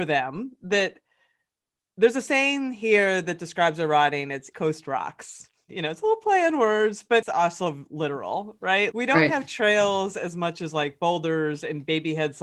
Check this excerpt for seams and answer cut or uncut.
cut